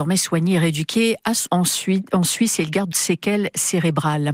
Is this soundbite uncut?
no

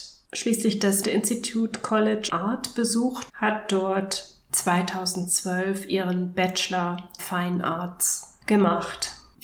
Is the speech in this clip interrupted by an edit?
yes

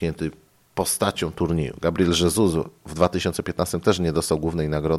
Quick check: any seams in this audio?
no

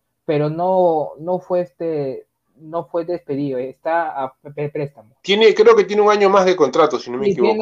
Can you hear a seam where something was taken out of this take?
yes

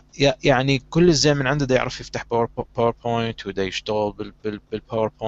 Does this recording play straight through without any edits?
yes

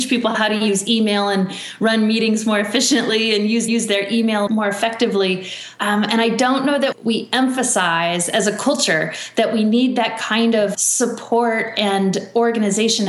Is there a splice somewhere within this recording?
yes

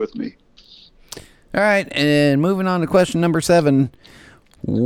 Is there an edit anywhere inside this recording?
no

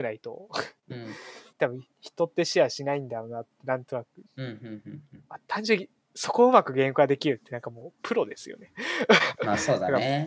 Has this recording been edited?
yes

